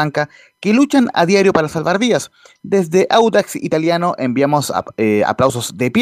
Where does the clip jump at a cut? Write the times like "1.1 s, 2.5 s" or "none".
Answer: none